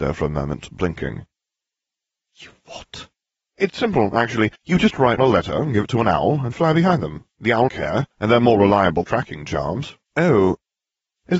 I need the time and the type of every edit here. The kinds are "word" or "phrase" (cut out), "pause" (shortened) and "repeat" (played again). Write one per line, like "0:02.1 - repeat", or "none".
0:03.7 - word
0:04.6 - pause
0:05.2 - word
0:06.5 - word
0:07.7 - word
0:08.1 - pause
0:09.0 - phrase
0:10.0 - pause

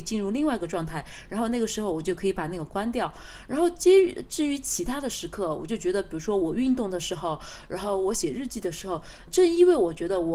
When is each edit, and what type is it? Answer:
0:09.3 - word

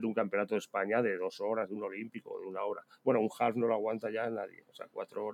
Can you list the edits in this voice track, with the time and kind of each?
none

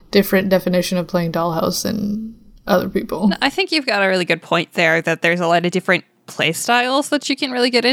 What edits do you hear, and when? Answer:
none

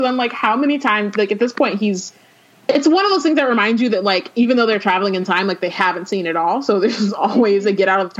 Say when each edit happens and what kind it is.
none

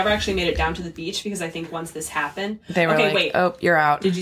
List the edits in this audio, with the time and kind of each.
none

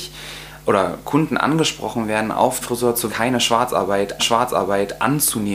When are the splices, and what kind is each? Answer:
0:02.6 - word
0:03.1 - word
0:04.2 - repeat

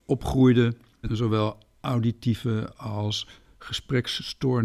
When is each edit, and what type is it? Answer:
0:01.1 - word

